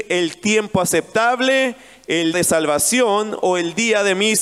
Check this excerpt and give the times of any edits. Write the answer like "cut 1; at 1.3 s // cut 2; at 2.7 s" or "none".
cut 1; at 2.3 s